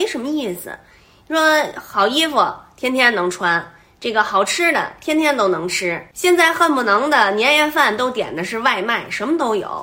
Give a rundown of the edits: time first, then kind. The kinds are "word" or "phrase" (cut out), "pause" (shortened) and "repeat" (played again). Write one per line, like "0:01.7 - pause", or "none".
none